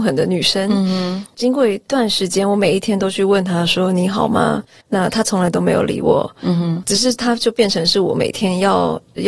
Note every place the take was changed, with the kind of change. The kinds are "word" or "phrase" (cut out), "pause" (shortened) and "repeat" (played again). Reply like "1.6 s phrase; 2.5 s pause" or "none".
4.8 s pause